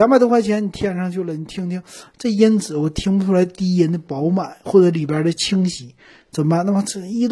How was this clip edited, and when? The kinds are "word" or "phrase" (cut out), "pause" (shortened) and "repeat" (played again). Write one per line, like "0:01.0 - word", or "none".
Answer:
none